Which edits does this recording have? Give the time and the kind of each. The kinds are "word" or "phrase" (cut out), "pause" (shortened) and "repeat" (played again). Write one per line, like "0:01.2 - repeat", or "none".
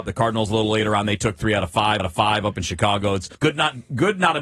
0:02.0 - repeat
0:03.3 - pause